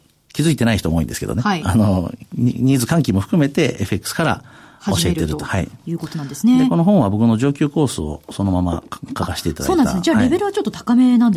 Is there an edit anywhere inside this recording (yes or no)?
no